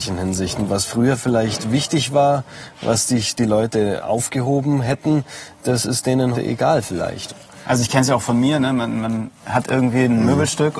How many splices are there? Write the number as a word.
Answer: two